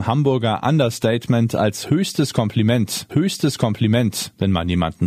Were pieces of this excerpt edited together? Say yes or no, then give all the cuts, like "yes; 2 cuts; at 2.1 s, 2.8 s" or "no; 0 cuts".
yes; 1 cut; at 3.1 s